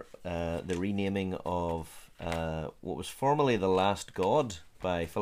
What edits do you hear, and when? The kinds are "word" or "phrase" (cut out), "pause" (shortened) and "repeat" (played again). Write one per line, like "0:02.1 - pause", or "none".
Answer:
none